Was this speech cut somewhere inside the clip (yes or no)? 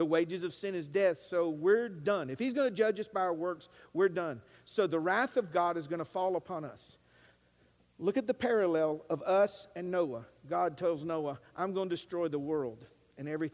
no